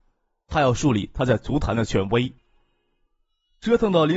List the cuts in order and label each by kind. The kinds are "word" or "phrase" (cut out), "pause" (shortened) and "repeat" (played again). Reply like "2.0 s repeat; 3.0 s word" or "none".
none